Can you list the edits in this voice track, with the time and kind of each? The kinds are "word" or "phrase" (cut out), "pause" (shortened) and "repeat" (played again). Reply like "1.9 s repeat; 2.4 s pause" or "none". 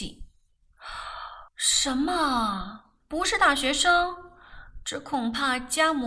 1.5 s pause